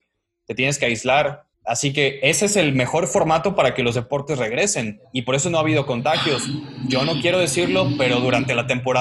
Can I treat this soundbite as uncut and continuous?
no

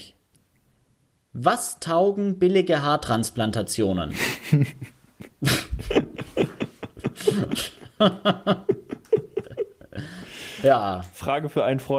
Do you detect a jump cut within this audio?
yes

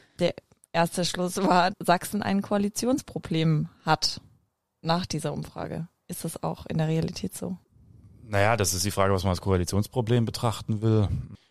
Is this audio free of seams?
no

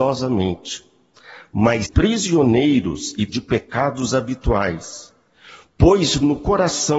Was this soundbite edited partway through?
yes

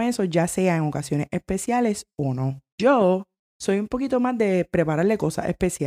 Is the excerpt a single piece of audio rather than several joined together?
yes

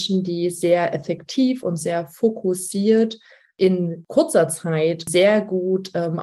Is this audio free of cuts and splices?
yes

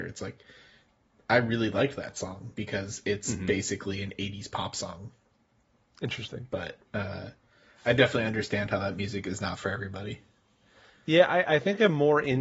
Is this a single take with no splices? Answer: yes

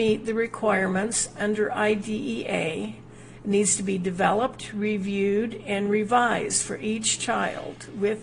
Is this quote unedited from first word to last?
yes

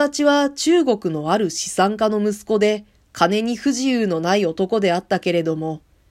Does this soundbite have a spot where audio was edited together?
no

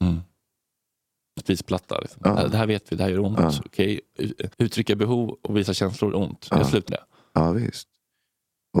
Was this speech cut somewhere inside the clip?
yes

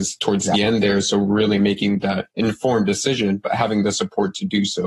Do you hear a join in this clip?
yes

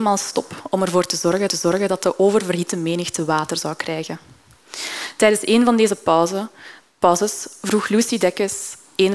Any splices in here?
yes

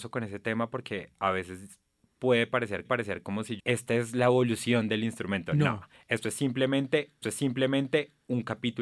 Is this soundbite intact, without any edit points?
no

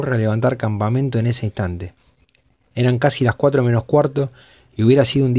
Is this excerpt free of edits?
yes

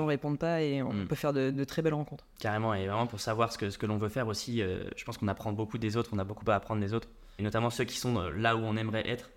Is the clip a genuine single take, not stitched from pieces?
no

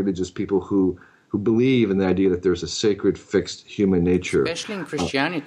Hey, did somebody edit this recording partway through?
no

